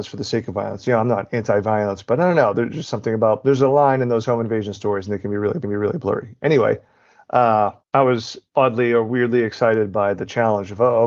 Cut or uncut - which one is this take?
cut